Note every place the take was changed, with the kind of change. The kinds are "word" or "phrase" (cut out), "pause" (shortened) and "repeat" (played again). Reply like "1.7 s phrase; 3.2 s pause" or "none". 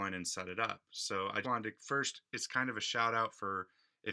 1.4 s word